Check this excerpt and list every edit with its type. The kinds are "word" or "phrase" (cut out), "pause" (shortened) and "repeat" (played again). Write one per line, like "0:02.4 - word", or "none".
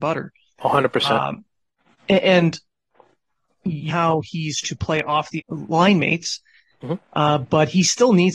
0:03.9 - word
0:04.6 - word
0:05.4 - word